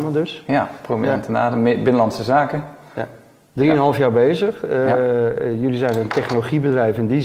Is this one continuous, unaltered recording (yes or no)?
yes